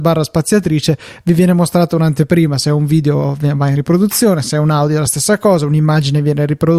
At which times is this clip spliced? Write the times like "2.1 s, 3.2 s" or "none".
none